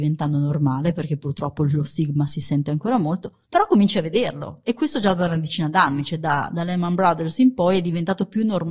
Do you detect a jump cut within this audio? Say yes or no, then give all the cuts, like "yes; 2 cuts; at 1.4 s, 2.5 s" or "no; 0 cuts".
yes; 1 cut; at 3.4 s